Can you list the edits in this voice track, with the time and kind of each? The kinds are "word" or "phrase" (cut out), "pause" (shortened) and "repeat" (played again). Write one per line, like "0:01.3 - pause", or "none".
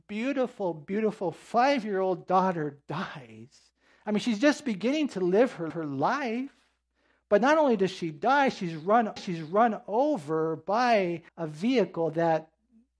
0:05.7 - repeat
0:09.2 - repeat
0:11.3 - pause